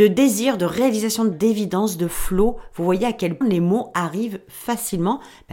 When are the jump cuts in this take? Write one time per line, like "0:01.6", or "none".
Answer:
0:01.3
0:03.4